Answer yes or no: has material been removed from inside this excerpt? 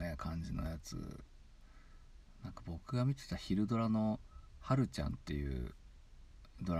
no